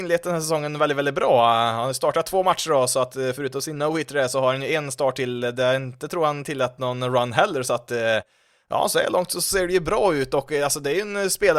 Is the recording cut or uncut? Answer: uncut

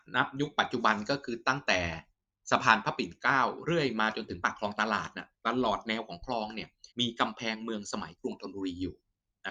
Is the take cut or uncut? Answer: cut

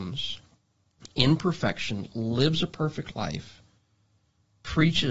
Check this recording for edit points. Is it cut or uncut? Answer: uncut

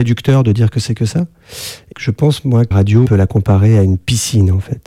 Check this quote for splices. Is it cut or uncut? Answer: cut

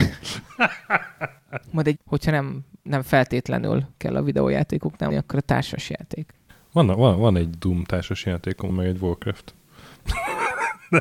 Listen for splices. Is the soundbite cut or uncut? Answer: cut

